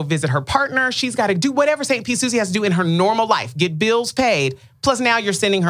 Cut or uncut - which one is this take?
uncut